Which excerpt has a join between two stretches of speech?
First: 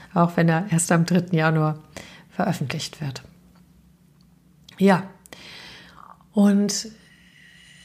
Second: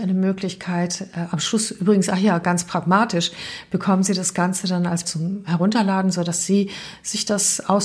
second; 1 cut; at 5.0 s

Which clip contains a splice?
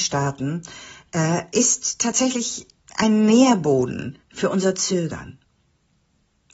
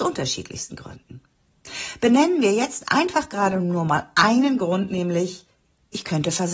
first; 1 cut; at 4.2 s

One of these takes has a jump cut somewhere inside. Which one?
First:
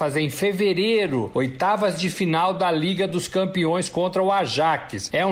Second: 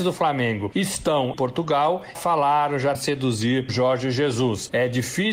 second; 4 cuts; at 1.3 s, 2.1 s, 2.9 s, 3.7 s

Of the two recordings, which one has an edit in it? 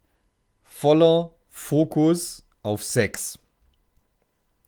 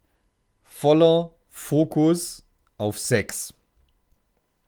first; 1 cut; at 2.5 s

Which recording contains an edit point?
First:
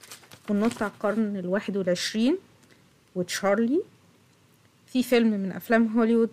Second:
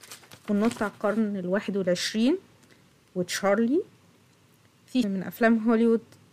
second; 1 cut; at 5.0 s

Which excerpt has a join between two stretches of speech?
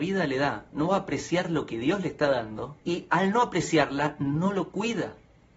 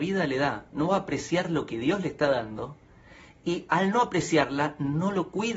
first; 1 cut; at 2.8 s

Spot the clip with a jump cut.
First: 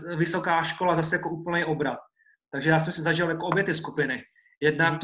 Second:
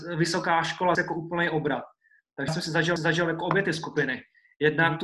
second; 3 cuts; at 0.9 s, 2.5 s, 3.0 s

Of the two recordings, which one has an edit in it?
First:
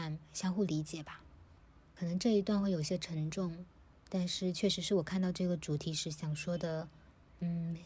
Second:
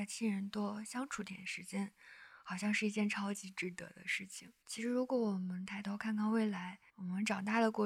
second; 2 cuts; at 4.6 s, 6.9 s

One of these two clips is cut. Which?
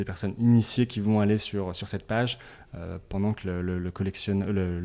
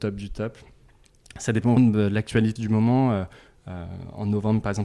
second; 2 cuts; at 1.8 s, 2.6 s

